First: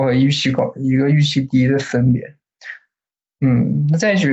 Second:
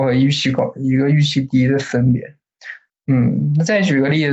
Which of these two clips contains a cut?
second; 1 cut; at 2.9 s

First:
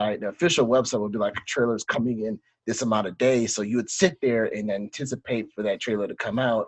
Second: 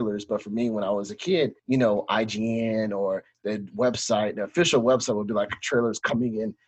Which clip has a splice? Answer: second; 1 cut; at 1.6 s

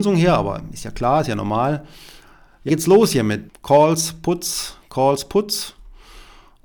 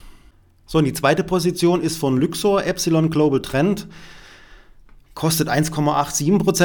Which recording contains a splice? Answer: first; 2 cuts; at 2.7 s, 3.5 s

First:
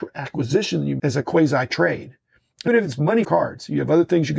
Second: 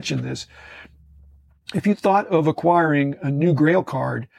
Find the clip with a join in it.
first; 3 cuts; at 1.0 s, 2.7 s, 3.2 s

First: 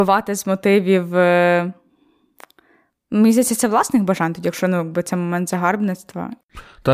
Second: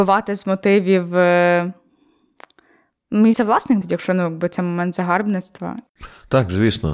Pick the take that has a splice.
second; 2 cuts; at 3.3 s, 3.8 s

